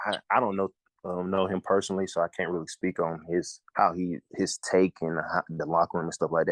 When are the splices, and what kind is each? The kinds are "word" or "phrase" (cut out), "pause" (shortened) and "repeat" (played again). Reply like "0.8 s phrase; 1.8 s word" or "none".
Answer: 3.7 s pause